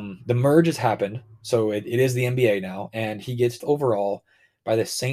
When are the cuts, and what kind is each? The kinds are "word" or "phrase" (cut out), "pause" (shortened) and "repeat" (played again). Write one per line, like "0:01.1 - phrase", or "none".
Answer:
0:03.6 - phrase